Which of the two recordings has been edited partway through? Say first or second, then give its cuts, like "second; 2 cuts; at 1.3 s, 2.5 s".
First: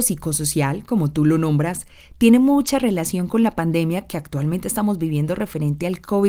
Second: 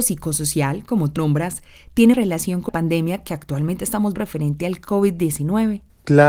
second; 4 cuts; at 1.2 s, 2.1 s, 2.7 s, 4.2 s